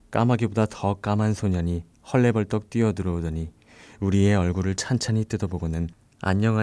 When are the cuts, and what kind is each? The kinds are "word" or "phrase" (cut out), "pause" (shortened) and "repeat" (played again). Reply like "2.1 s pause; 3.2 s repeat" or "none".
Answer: none